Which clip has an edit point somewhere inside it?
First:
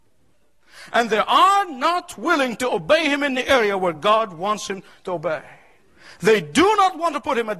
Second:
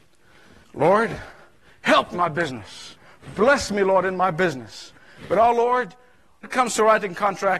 second; 2 cuts; at 2.1 s, 6.4 s

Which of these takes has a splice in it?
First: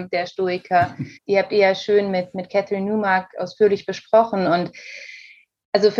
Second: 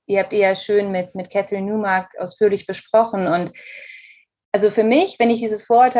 first; 1 cut; at 1.2 s

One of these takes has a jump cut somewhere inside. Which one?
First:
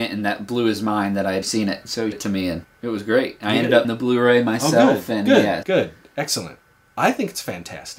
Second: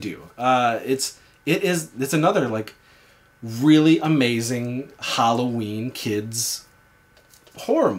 first; 5 cuts; at 1.4 s, 2.1 s, 2.6 s, 3.8 s, 5.6 s

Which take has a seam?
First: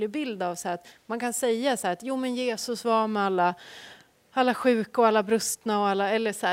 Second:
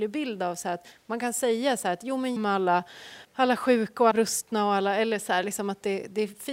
second; 3 cuts; at 2.4 s, 3.2 s, 4.1 s

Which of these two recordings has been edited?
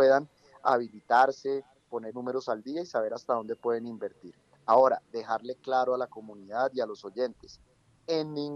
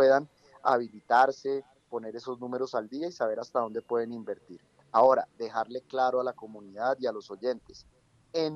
first; 1 cut; at 2.1 s

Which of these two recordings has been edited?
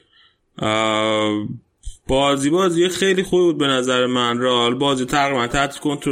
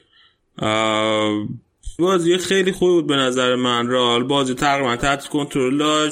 second; 1 cut; at 2.0 s

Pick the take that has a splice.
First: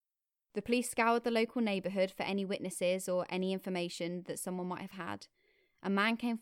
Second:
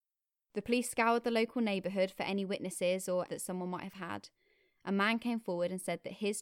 second; 1 cut; at 3.3 s

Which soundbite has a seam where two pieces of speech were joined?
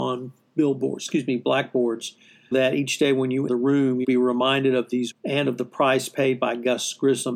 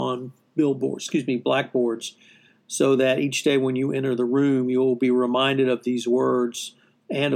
first; 4 cuts; at 2.5 s, 3.5 s, 4.0 s, 5.1 s

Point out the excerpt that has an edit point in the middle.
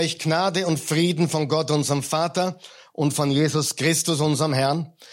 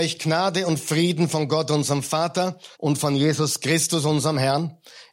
second; 1 cut; at 2.7 s

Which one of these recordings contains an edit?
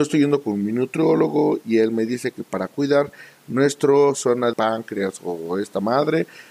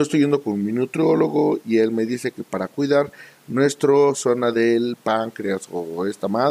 first; 1 cut; at 4.5 s

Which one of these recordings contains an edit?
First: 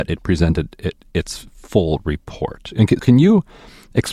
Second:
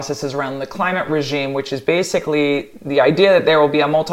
first; 1 cut; at 3.0 s

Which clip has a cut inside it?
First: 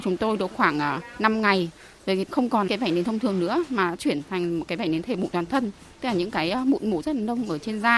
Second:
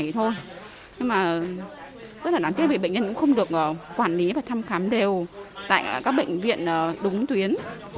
first; 2 cuts; at 2.3 s, 2.7 s

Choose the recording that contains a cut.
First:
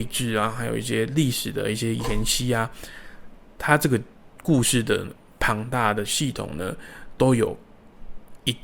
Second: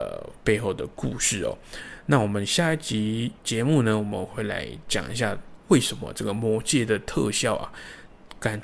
second; 1 cut; at 3.4 s

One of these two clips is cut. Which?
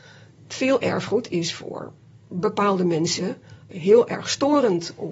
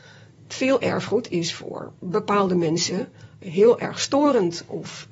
second; 1 cut; at 2.0 s

